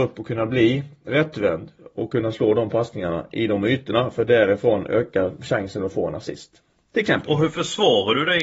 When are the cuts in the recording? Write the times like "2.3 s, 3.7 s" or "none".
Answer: none